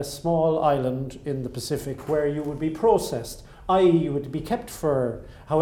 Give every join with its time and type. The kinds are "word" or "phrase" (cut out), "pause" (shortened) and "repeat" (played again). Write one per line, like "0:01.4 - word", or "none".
none

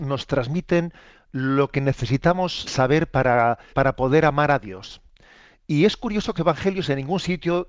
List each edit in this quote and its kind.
0:02.7 - word
0:03.7 - word
0:06.4 - word

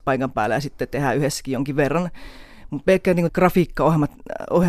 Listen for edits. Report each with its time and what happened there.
0:03.3 - word

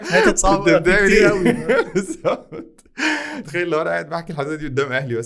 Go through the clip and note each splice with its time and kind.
0:03.4 - word

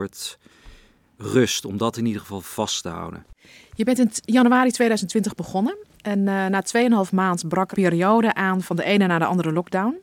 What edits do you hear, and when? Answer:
0:07.7 - phrase

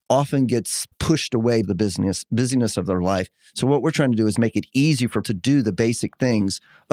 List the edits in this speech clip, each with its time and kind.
0:00.9 - pause
0:01.6 - word
0:04.3 - word
0:05.2 - word

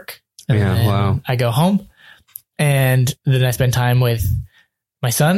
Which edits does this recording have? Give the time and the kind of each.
none

